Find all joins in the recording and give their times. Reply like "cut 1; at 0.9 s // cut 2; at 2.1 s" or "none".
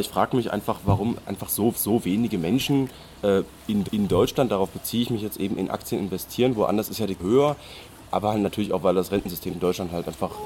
cut 1; at 1.7 s // cut 2; at 3.2 s // cut 3; at 3.8 s // cut 4; at 7.2 s // cut 5; at 9.5 s